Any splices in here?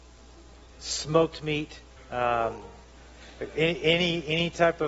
yes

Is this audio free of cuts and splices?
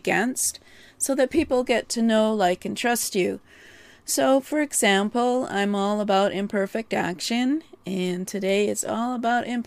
yes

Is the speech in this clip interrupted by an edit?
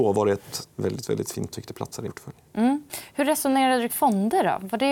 yes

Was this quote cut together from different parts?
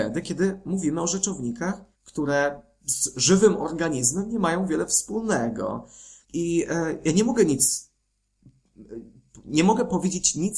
yes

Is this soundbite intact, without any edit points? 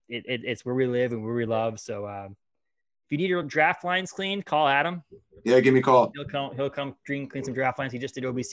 yes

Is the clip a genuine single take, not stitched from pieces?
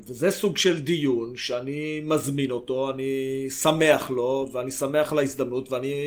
yes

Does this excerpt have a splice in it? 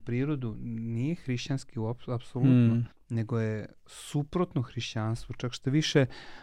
yes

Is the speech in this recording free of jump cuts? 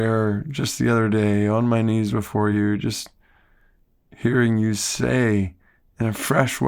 yes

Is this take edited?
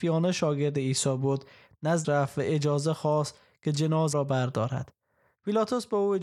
yes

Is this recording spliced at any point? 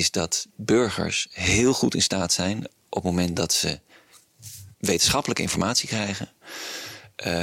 yes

